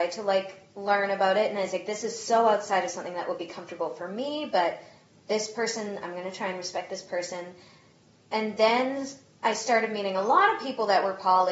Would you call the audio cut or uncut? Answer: uncut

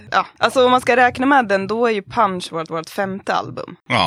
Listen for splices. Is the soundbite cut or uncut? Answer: cut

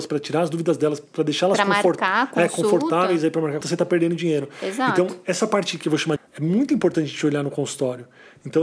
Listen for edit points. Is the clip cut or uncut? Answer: cut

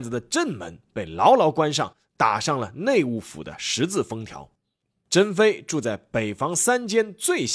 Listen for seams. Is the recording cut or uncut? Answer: uncut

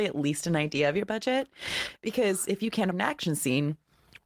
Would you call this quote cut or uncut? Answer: cut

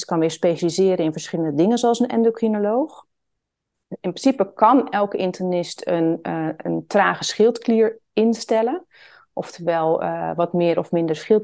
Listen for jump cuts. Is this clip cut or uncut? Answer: uncut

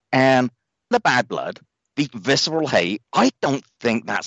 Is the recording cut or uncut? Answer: cut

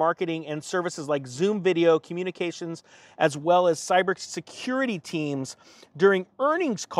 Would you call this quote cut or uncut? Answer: uncut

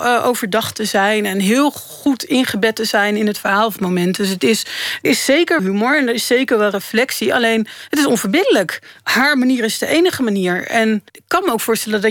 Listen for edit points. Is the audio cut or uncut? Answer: cut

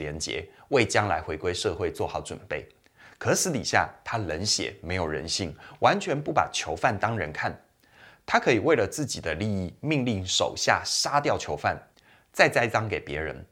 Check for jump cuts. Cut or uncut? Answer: uncut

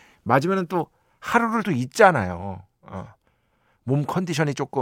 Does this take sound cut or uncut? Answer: cut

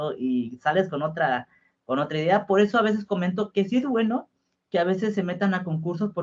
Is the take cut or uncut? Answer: uncut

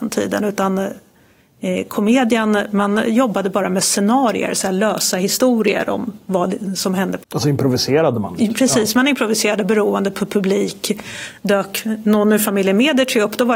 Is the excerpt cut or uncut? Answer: cut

